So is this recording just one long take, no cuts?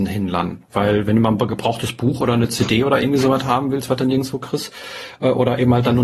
yes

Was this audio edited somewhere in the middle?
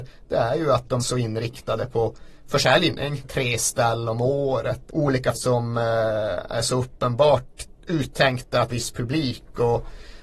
yes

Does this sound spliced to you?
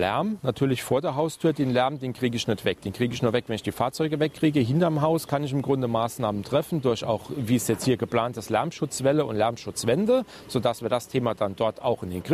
no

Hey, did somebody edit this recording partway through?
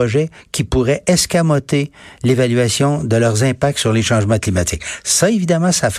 no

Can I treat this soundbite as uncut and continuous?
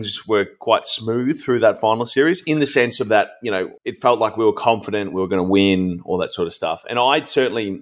no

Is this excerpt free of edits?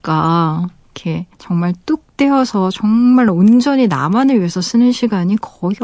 no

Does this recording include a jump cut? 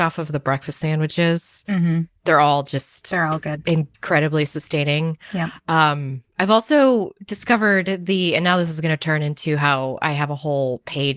yes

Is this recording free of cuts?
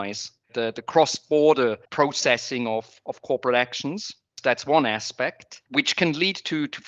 no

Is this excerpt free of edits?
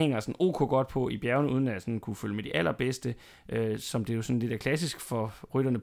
yes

